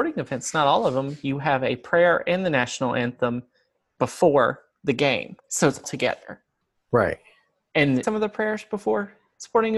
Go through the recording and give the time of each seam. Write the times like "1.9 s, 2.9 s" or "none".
3.7 s, 5.4 s, 5.8 s, 6.6 s, 8.0 s